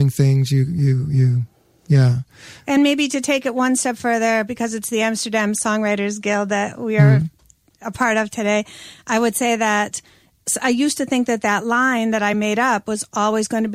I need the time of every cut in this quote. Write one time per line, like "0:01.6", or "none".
none